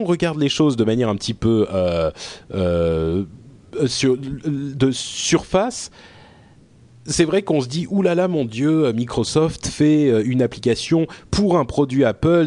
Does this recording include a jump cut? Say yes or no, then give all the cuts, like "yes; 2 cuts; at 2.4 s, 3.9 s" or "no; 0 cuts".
no; 0 cuts